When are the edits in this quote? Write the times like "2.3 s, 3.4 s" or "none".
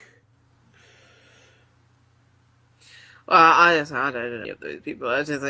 4.4 s